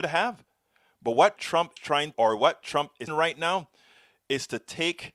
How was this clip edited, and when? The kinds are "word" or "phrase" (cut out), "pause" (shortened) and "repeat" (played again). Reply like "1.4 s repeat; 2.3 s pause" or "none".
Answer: 1.4 s word; 1.8 s word; 2.1 s word; 2.6 s word; 3.1 s word